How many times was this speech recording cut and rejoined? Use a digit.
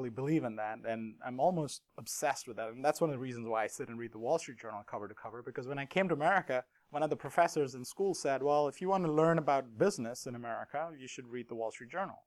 2